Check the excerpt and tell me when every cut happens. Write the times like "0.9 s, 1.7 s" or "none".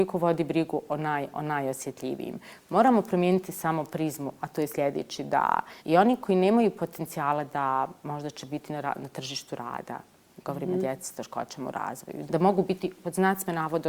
5.8 s, 12.3 s